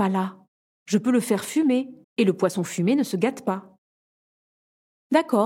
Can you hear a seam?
yes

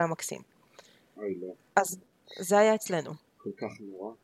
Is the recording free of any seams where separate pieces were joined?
yes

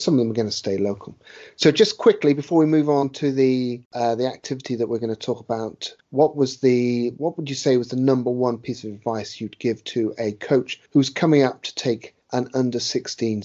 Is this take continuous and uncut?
no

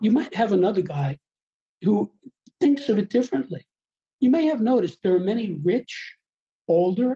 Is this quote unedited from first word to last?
yes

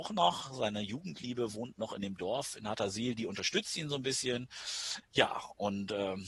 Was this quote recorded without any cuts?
no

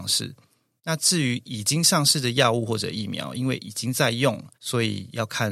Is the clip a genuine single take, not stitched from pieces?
no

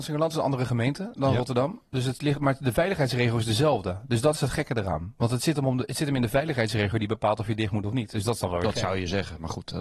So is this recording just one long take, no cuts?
yes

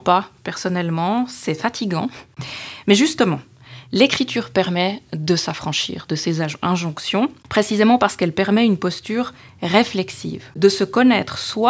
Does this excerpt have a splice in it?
no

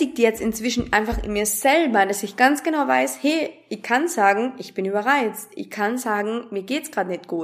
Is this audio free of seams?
yes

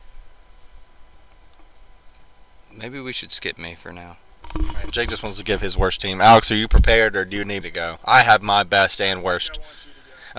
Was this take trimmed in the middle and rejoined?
yes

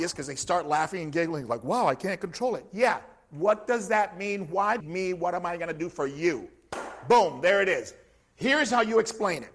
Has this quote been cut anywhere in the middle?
yes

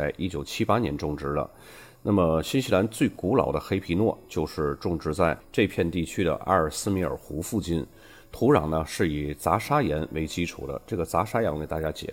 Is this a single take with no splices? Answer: yes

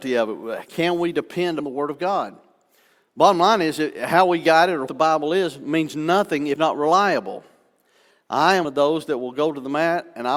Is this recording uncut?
no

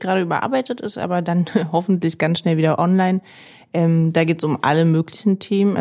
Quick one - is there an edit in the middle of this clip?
no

